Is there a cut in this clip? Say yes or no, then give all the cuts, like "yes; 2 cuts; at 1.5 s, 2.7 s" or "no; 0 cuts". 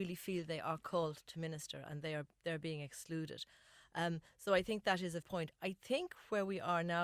yes; 1 cut; at 5.2 s